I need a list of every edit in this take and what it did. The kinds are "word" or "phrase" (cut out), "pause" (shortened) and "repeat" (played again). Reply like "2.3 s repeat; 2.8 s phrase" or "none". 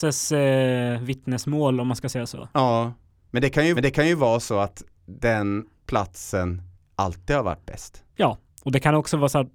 3.7 s repeat; 6.7 s pause; 8.1 s pause